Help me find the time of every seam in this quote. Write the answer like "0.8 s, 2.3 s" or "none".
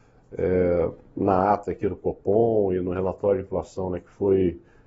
none